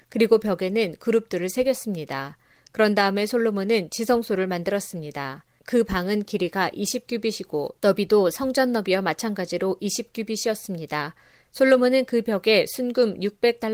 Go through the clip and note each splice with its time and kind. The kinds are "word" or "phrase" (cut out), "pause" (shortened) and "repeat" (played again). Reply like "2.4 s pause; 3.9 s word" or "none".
none